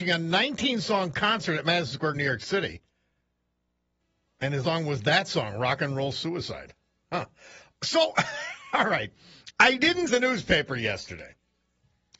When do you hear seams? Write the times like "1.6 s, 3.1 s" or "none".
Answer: 2.1 s, 4.6 s, 10.1 s